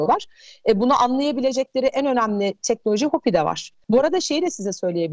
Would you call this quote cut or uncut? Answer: uncut